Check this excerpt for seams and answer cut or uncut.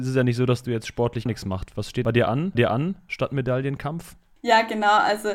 cut